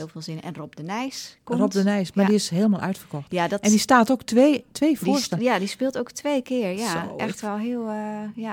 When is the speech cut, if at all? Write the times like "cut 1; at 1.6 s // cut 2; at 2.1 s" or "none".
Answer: none